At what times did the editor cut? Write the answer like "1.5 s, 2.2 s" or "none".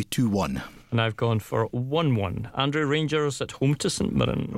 none